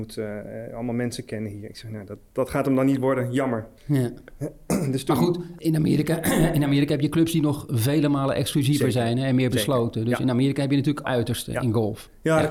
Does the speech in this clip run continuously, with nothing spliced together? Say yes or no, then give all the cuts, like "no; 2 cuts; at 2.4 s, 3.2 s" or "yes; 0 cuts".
no; 3 cuts; at 3.8 s, 5.6 s, 11.0 s